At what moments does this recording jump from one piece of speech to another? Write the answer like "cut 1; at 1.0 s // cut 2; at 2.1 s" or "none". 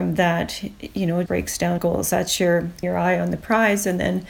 cut 1; at 1.3 s // cut 2; at 1.8 s // cut 3; at 2.8 s